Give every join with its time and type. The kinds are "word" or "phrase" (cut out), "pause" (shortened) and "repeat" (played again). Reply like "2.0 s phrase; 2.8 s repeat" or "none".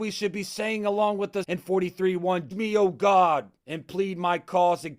1.4 s word; 2.5 s word; 3.6 s pause